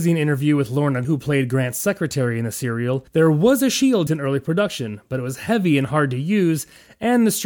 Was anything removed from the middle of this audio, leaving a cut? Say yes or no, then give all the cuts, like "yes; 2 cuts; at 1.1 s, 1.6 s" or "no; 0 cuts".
yes; 3 cuts; at 1.0 s, 3.1 s, 4.1 s